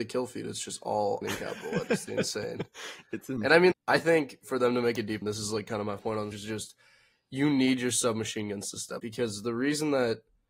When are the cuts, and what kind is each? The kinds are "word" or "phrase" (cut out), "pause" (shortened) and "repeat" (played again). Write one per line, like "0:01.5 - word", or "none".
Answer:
0:01.2 - word
0:02.1 - word
0:03.7 - word
0:05.2 - word
0:06.0 - word
0:06.3 - word
0:09.0 - word

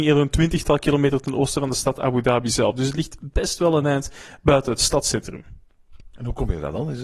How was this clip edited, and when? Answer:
none

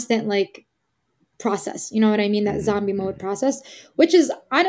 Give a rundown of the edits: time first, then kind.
none

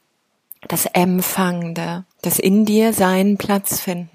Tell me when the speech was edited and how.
0:02.1 - pause

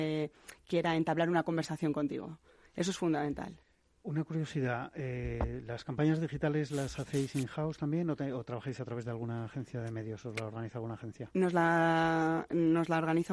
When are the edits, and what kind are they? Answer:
none

